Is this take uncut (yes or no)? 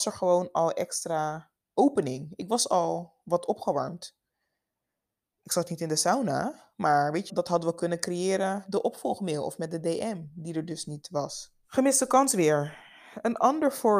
no